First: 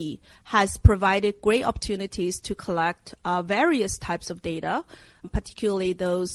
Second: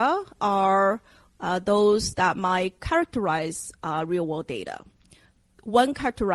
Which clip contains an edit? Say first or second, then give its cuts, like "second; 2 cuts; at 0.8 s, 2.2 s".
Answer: first; 1 cut; at 5.2 s